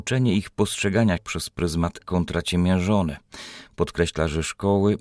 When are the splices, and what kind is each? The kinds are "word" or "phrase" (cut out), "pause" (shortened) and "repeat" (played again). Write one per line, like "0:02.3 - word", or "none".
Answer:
0:01.2 - word
0:02.0 - word

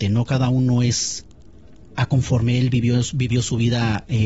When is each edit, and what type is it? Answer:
none

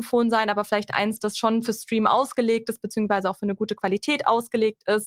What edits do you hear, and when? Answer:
none

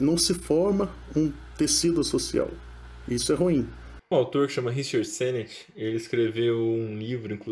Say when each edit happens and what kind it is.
0:04.1 - word

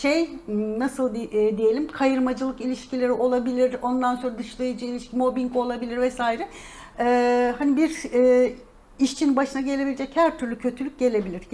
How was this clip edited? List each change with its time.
none

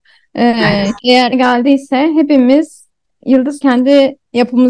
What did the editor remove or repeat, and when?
0:01.0 - word
0:01.3 - phrase
0:03.6 - word

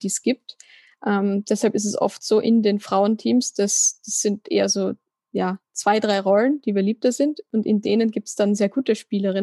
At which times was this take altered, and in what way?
none

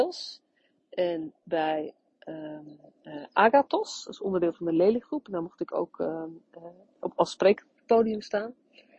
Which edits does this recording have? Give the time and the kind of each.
none

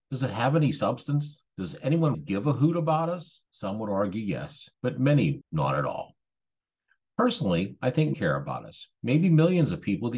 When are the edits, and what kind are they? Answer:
0:01.5 - pause
0:02.1 - word
0:03.5 - pause
0:04.7 - pause
0:05.4 - phrase
0:08.1 - word

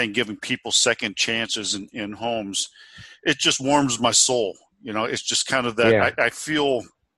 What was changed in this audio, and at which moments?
none

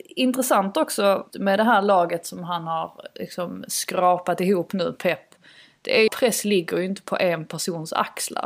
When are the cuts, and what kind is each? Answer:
0:01.3 - word
0:06.1 - phrase

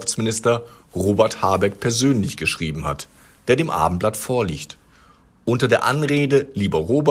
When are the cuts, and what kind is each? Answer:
none

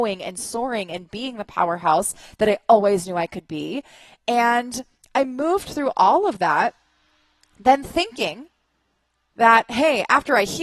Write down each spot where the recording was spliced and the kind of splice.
none

